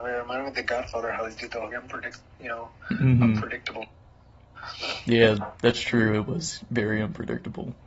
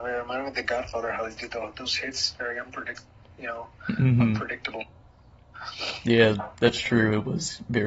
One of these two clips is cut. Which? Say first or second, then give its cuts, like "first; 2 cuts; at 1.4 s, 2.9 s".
first; 2 cuts; at 1.7 s, 2.3 s